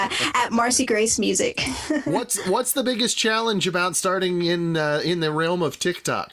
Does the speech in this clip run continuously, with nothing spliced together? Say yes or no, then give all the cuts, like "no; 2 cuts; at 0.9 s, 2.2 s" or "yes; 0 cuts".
yes; 0 cuts